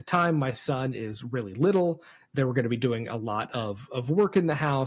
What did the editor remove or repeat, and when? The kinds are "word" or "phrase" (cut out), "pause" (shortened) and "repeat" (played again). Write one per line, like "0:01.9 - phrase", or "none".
none